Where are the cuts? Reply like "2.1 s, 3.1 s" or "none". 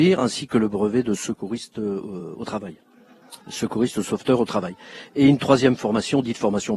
3.4 s